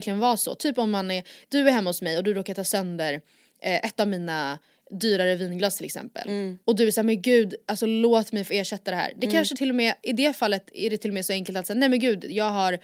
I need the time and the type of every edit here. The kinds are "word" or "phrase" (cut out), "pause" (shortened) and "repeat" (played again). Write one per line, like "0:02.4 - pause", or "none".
none